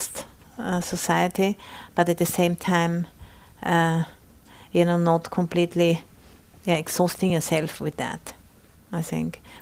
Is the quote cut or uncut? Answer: uncut